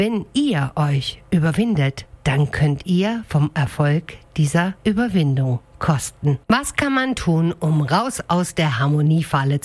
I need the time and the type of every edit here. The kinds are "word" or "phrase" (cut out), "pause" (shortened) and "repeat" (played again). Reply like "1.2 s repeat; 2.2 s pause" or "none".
4.8 s pause; 6.4 s pause